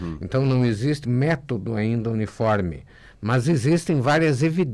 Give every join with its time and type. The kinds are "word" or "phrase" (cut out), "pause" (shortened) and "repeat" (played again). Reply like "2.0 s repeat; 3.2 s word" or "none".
1.0 s word